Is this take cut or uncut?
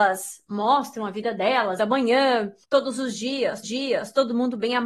cut